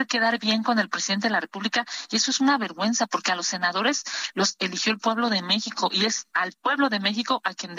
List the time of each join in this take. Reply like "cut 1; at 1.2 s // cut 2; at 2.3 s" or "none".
none